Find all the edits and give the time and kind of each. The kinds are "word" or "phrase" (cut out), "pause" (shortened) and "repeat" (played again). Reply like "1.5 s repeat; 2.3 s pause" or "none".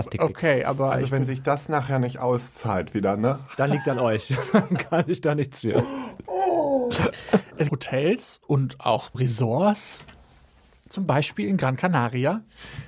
7.7 s phrase; 9.1 s word